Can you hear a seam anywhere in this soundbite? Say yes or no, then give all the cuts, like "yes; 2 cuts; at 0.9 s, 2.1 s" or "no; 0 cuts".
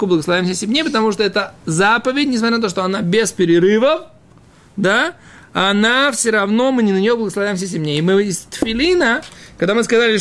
no; 0 cuts